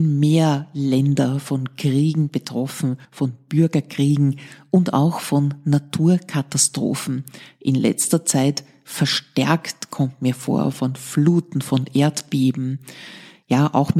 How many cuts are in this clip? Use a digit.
1